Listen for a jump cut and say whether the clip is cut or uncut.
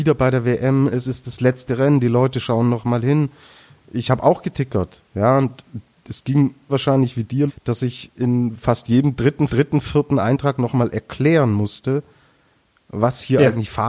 cut